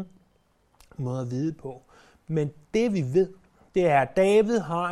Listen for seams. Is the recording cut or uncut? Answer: uncut